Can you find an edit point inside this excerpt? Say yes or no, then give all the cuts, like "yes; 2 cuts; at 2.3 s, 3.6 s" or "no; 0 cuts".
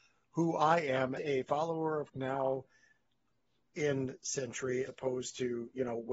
yes; 4 cuts; at 1.2 s, 2.1 s, 4.2 s, 4.9 s